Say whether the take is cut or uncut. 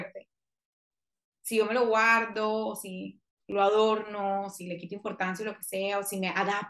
cut